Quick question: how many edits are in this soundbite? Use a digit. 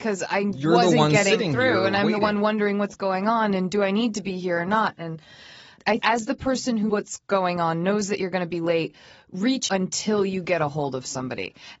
3